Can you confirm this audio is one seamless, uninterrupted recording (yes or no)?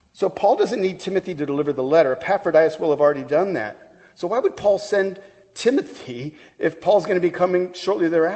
yes